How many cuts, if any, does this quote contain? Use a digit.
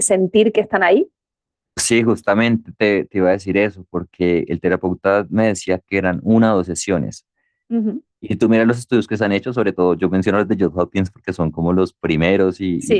0